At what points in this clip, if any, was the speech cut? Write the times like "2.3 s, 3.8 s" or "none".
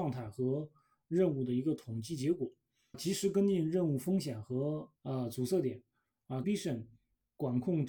2.9 s, 5.0 s, 6.4 s